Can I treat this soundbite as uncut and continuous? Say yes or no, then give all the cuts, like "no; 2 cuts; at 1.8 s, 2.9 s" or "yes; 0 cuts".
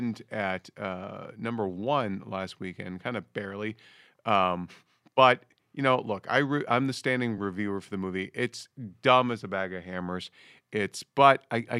yes; 0 cuts